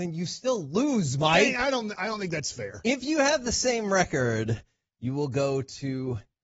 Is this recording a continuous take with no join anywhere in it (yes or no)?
yes